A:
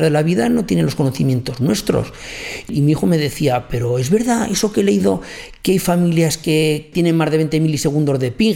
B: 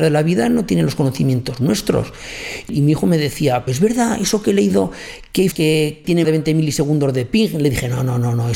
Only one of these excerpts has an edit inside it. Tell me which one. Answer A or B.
B